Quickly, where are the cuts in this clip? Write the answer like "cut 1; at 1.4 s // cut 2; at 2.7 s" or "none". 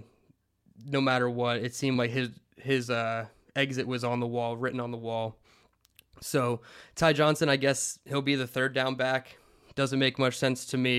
none